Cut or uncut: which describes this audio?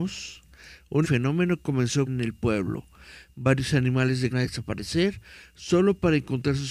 cut